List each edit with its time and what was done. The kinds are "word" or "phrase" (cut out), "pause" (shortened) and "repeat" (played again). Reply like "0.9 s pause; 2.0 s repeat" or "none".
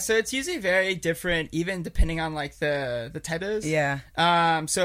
3.4 s phrase